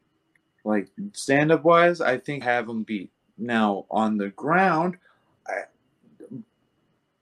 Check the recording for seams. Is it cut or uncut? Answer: cut